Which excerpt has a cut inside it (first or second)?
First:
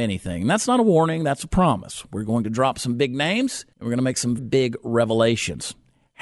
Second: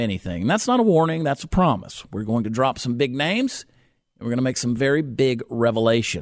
first